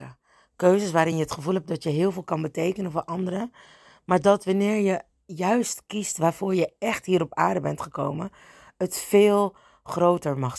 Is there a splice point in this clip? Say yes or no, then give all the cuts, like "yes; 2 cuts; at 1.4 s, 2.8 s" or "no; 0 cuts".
no; 0 cuts